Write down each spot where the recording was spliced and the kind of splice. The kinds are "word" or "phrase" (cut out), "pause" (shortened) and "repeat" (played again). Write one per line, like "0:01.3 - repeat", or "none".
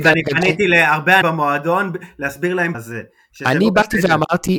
0:01.2 - word
0:02.7 - phrase